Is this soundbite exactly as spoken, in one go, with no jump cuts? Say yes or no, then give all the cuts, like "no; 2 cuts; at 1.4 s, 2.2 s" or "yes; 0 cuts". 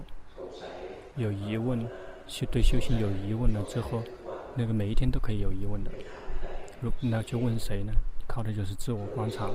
no; 1 cut; at 1.1 s